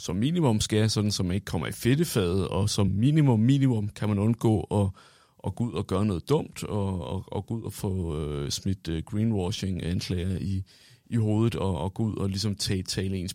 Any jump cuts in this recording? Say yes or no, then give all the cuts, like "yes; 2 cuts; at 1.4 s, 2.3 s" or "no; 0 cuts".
no; 0 cuts